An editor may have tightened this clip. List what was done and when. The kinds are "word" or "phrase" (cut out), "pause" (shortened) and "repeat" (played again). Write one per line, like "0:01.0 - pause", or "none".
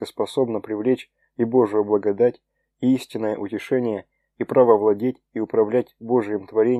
none